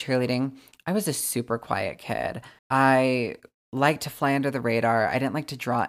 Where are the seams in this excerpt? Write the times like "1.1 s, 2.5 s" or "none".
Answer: 2.6 s